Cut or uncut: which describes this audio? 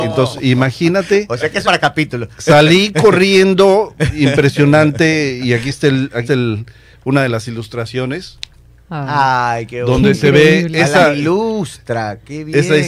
cut